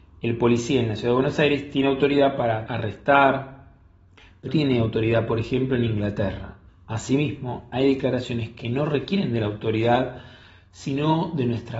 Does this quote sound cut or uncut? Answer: cut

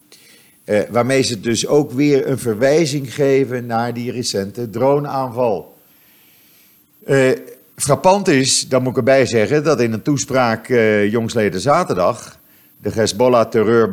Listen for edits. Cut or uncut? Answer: uncut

